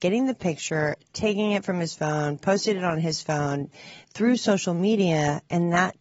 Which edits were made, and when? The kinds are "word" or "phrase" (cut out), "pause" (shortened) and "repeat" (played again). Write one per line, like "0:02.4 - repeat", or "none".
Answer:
0:04.0 - pause